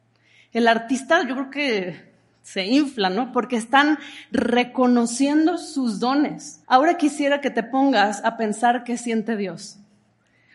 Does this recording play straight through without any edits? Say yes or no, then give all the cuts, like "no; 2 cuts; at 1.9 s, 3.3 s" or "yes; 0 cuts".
no; 1 cut; at 6.6 s